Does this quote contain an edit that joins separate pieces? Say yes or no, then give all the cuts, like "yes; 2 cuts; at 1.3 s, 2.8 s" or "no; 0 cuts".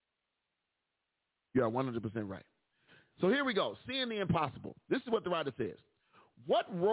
no; 0 cuts